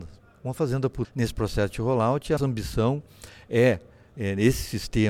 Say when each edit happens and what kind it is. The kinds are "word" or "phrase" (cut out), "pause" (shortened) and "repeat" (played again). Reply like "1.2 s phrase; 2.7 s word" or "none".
1.0 s word; 2.4 s word